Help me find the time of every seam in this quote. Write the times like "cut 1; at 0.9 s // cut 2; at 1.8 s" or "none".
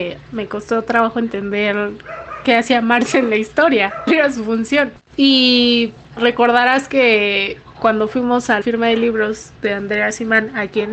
cut 1; at 4.1 s // cut 2; at 8.6 s // cut 3; at 9.5 s